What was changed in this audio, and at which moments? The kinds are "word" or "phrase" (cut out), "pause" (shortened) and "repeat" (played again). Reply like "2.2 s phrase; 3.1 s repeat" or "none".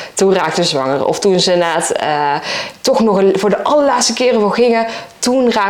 none